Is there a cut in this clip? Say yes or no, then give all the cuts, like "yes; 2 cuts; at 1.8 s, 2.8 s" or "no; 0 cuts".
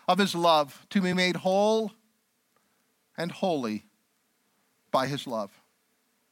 no; 0 cuts